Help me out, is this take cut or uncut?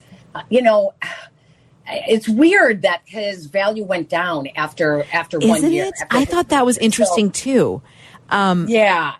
uncut